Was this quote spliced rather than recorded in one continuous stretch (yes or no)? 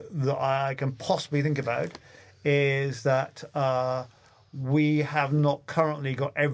no